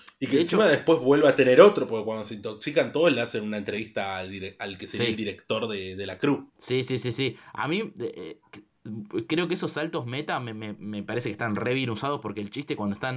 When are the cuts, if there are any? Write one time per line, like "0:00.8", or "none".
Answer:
0:06.5